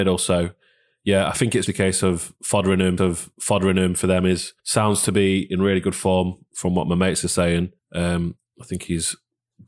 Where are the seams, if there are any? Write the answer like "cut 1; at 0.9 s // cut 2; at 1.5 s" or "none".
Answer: cut 1; at 1.7 s // cut 2; at 3.0 s // cut 3; at 4.6 s // cut 4; at 7.8 s